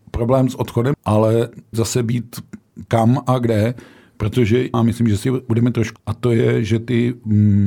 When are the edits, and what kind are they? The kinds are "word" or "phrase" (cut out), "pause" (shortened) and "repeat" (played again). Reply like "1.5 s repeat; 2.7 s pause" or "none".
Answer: 0.9 s word; 1.7 s word; 2.9 s word; 4.7 s phrase; 5.2 s word; 6.0 s word